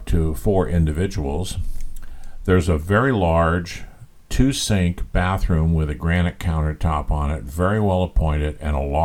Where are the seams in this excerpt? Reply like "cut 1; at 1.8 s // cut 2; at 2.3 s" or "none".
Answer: none